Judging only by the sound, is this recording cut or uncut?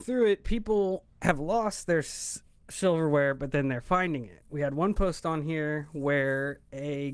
uncut